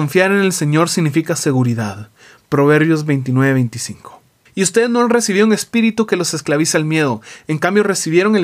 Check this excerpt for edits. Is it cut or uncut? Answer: cut